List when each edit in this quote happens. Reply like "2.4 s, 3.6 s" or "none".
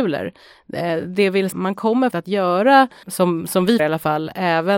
1.5 s, 2.1 s, 3.0 s, 3.8 s

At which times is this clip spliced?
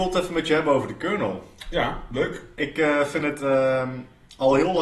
none

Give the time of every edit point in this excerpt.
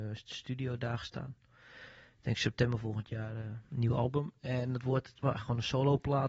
none

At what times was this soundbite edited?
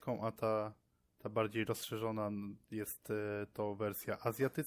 none

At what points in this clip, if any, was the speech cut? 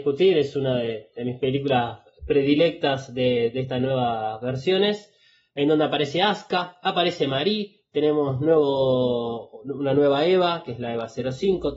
none

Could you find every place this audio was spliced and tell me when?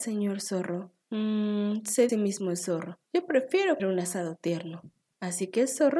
1.0 s, 2.1 s, 3.1 s, 3.8 s

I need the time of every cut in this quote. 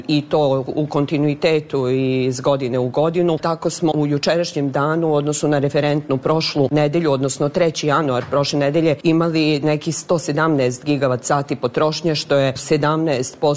3.9 s

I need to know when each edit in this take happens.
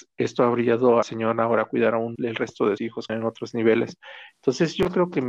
1.0 s, 2.1 s, 2.8 s, 3.1 s

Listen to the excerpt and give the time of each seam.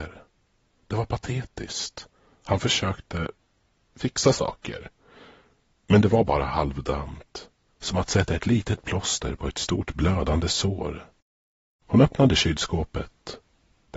none

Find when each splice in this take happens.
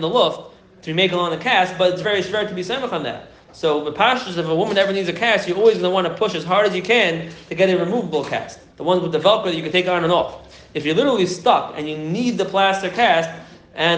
2.0 s, 8.7 s

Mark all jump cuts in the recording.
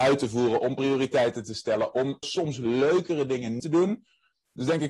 2.2 s, 3.6 s

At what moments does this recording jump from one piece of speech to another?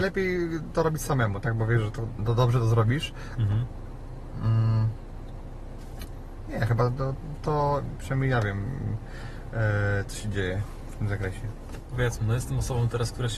2.2 s, 7.4 s

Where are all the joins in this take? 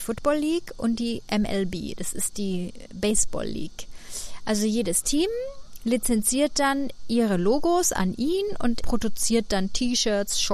8.8 s

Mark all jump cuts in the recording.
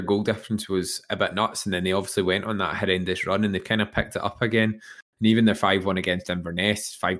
none

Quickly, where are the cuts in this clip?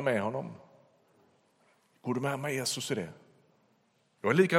none

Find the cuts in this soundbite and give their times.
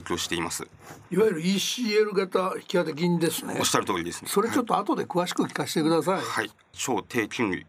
none

